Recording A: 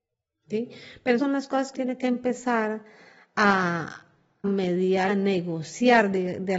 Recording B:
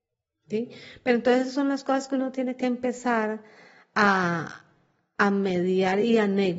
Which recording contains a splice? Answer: A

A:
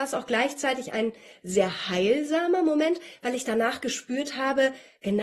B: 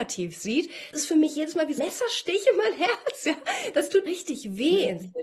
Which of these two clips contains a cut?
B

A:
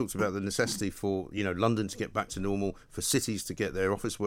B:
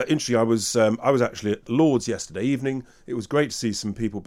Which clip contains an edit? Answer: B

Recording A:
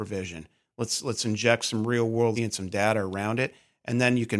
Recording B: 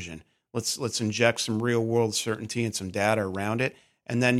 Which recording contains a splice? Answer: A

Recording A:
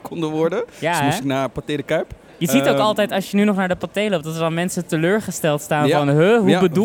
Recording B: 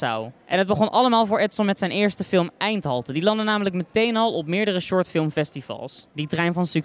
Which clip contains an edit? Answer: A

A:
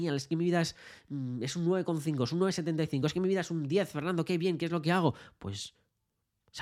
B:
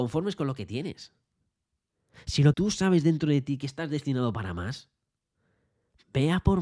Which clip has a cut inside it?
B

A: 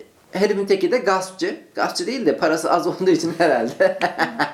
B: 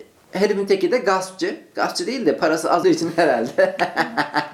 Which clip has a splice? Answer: B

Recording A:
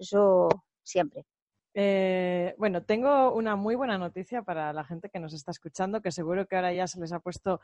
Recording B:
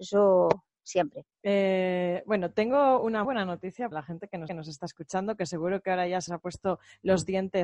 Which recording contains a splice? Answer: B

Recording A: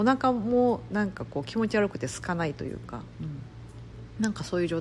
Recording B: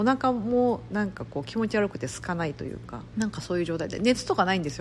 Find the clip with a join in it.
B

